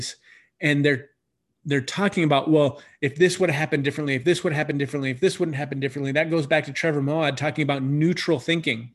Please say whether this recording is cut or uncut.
uncut